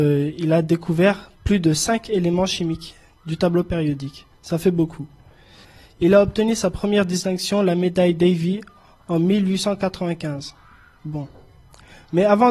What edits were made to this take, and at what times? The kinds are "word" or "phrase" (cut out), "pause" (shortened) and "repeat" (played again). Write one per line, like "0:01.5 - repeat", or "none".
none